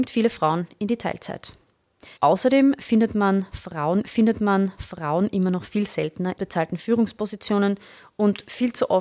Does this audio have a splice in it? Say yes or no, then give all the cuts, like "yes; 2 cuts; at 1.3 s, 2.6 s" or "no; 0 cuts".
yes; 3 cuts; at 2.2 s, 4.0 s, 6.4 s